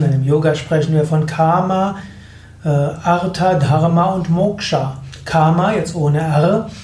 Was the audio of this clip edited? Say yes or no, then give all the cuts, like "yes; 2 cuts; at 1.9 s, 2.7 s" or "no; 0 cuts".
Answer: no; 0 cuts